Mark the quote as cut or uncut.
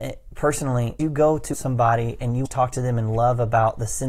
cut